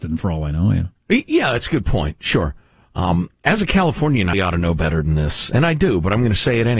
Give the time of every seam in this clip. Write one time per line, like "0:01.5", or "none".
0:04.3